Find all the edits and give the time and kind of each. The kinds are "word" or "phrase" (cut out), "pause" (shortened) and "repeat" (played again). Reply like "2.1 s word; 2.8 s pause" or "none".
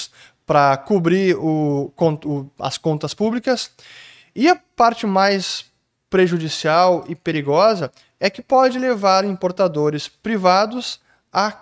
none

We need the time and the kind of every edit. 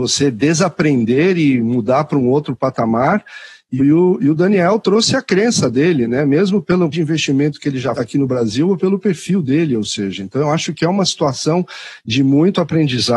3.8 s word; 6.9 s word; 7.9 s word

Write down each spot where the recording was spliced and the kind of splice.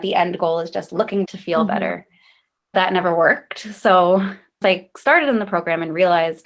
1.2 s word; 2.7 s word; 4.6 s word

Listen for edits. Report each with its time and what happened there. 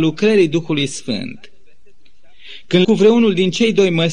2.8 s word

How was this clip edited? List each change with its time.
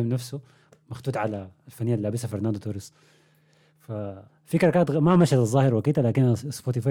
4.3 s pause

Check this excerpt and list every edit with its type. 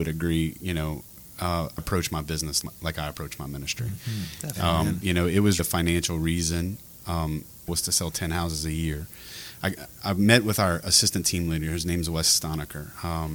1.8 s word; 2.6 s word; 5.6 s word; 7.7 s phrase

